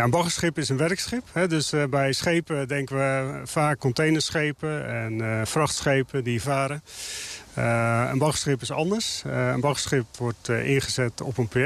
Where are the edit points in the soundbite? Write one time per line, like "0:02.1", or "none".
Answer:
0:03.8
0:06.4

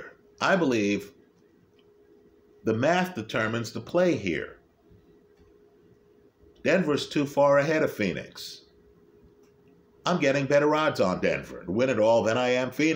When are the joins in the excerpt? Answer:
none

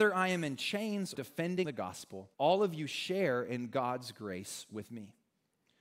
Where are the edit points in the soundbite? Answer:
0:01.1
0:01.6
0:02.3

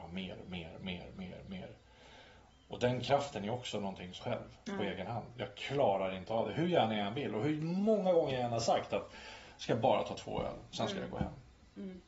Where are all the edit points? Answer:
0:04.2

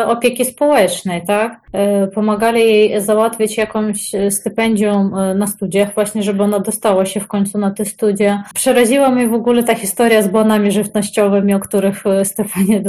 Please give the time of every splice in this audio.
none

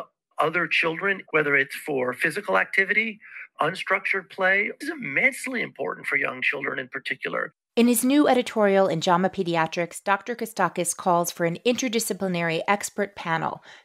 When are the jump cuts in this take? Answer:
0:04.8

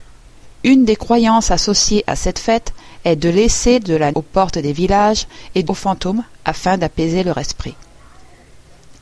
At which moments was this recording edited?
0:04.1
0:05.7

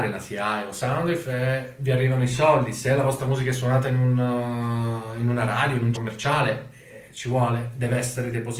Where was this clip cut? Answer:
0:05.9

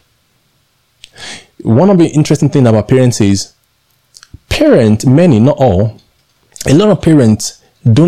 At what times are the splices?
none

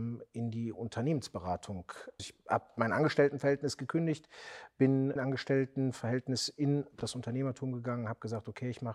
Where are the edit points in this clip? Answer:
0:02.2
0:05.2

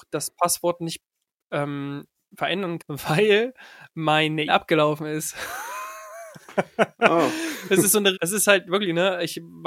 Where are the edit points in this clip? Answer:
0:02.8
0:04.5
0:08.1

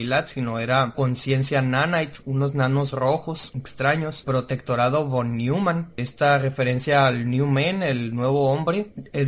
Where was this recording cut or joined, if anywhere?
0:00.9
0:04.2

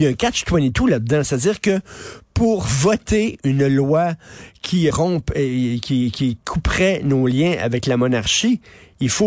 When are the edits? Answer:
0:04.9

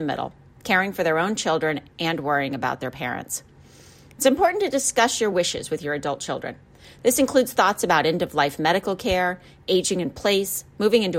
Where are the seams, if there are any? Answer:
none

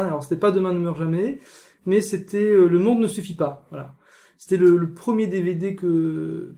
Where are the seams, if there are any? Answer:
none

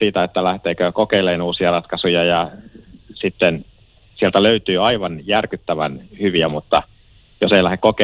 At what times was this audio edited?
0:06.5

